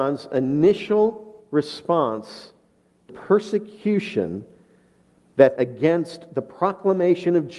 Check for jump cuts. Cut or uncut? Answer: cut